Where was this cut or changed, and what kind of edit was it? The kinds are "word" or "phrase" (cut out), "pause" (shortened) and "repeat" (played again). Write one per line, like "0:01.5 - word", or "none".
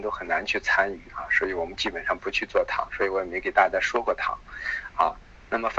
none